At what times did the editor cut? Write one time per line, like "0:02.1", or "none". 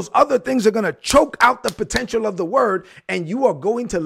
none